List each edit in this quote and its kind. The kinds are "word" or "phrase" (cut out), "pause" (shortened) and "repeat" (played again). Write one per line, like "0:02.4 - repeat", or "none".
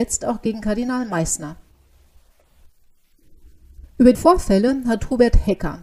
0:04.1 - word